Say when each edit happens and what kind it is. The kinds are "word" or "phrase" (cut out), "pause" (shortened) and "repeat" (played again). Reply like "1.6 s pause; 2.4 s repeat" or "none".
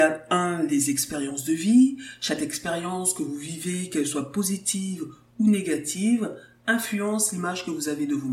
none